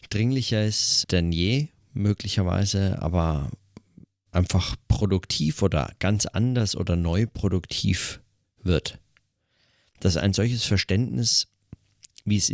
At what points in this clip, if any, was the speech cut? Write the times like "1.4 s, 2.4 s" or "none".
1.0 s